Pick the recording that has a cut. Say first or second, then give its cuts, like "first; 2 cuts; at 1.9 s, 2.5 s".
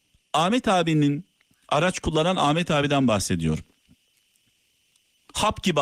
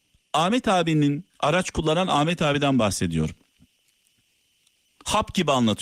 second; 1 cut; at 1.3 s